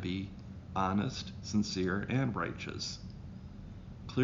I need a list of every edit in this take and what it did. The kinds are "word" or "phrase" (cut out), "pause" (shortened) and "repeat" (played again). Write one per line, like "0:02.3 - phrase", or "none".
none